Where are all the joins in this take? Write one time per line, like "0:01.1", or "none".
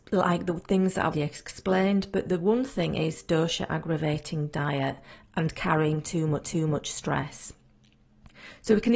0:01.1
0:06.4